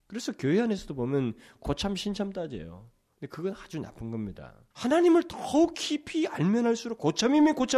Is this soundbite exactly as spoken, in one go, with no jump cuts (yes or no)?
no